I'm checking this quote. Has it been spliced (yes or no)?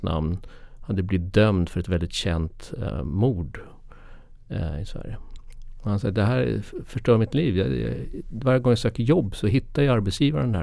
no